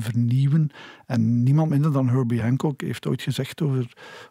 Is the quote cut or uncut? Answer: uncut